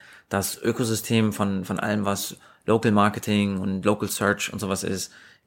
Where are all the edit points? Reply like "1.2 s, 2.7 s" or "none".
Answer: none